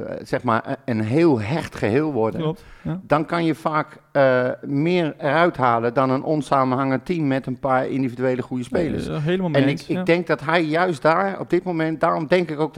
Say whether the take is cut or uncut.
uncut